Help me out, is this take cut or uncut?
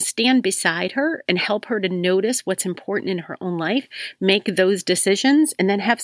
uncut